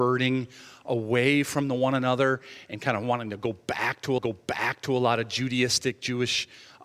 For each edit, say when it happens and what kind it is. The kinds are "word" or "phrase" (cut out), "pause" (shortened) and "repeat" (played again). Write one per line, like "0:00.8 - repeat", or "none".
0:04.2 - repeat